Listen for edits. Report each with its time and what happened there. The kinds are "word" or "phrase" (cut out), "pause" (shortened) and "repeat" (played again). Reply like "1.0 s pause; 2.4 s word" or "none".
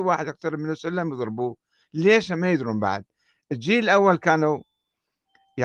none